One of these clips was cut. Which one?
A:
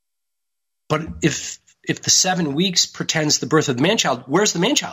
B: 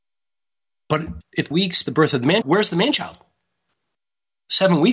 B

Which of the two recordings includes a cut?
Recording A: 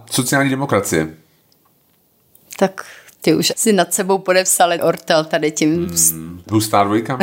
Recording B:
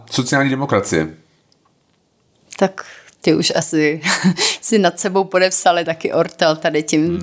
A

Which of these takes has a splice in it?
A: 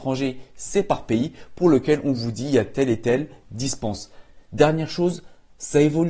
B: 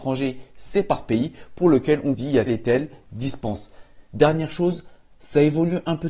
B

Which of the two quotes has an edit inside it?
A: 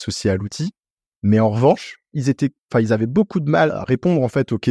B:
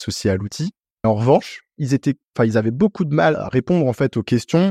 B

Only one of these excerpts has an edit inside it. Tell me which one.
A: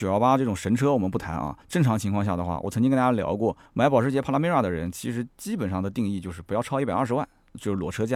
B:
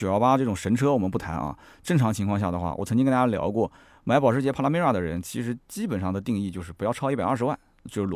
A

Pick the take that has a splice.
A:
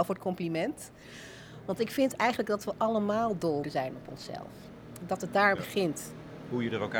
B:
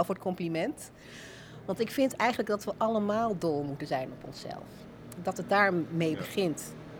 A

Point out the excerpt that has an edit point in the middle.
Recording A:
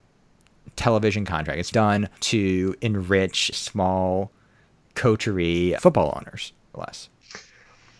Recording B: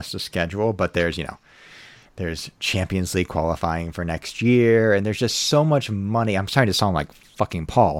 A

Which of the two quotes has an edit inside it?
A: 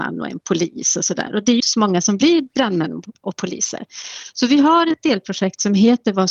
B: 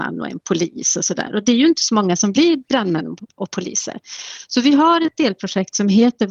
A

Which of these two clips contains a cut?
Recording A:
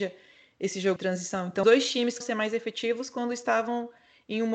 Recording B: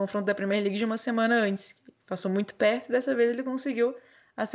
A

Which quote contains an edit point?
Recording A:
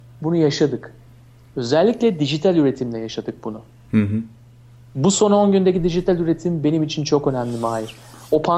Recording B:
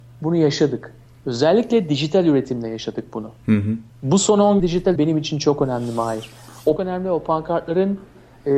B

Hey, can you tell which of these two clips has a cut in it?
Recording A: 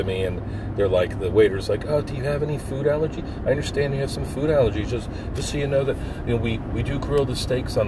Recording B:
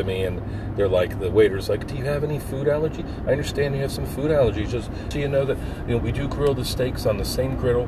B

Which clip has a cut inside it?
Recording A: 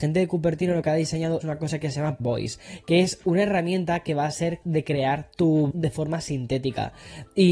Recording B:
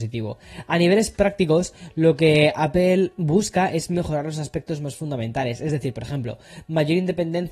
A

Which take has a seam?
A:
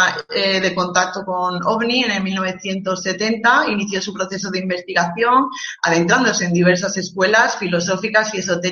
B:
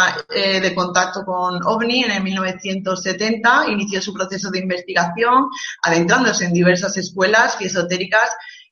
B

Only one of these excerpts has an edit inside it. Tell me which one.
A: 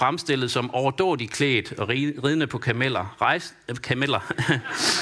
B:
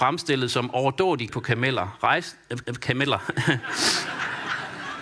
B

